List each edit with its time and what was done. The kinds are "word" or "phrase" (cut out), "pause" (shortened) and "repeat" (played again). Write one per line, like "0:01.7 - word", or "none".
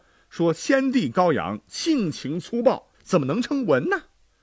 0:02.9 - pause